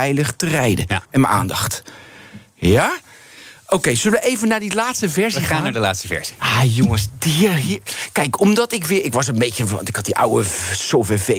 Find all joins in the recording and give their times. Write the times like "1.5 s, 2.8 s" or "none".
1.0 s